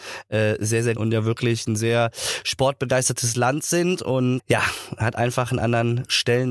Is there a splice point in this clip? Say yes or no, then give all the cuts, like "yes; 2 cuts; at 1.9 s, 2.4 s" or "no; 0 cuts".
yes; 2 cuts; at 1.0 s, 4.4 s